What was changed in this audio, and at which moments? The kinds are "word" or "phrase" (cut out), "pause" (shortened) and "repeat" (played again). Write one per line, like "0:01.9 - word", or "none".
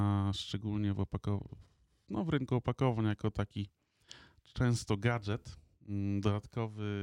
none